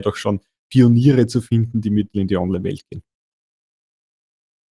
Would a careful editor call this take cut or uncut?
cut